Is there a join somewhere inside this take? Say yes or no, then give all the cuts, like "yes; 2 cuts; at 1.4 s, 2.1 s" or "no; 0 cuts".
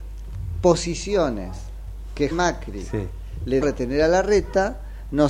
yes; 2 cuts; at 2.3 s, 3.6 s